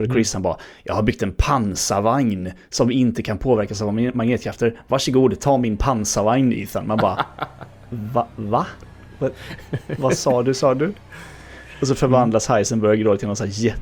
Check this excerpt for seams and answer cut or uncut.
uncut